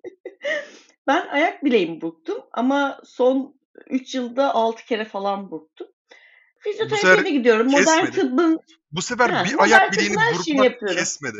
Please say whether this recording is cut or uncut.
uncut